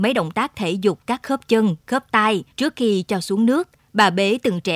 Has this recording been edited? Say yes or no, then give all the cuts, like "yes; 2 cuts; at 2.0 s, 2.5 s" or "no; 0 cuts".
yes; 2 cuts; at 2.5 s, 3.8 s